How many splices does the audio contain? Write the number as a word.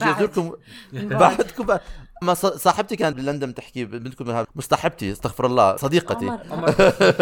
four